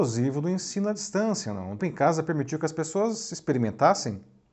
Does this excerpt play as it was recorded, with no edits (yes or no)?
no